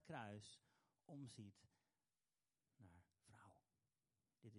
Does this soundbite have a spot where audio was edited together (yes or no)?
no